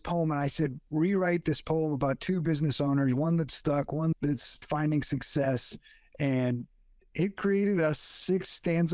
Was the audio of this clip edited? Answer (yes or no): no